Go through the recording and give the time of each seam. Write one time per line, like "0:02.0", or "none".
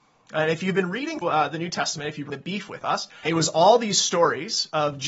0:01.2
0:02.3
0:03.2

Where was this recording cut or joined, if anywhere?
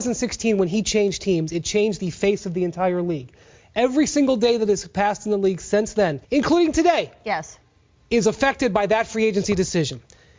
0:06.2

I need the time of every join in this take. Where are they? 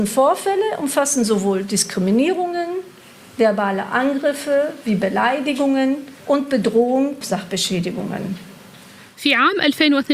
0:06.2
0:07.2

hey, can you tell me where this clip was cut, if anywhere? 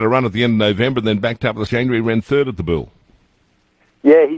0:01.7

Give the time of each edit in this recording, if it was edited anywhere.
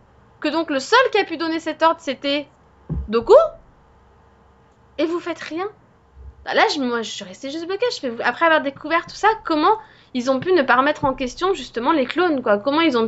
none

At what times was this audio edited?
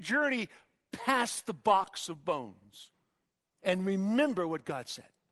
0:03.3

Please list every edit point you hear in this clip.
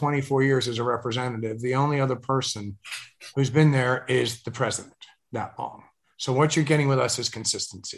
none

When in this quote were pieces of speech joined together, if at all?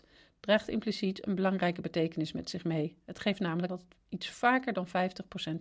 0:03.7

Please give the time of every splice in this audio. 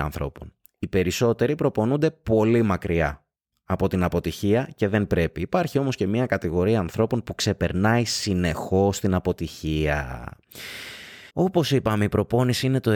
0:03.4
0:11.3

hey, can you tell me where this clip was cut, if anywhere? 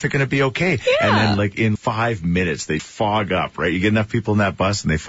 0:01.7
0:02.8

